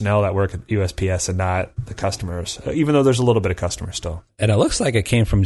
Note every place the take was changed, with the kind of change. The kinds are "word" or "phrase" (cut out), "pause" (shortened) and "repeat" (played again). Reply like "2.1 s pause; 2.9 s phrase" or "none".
none